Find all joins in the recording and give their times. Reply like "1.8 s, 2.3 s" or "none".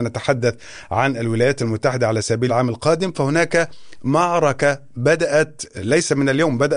2.5 s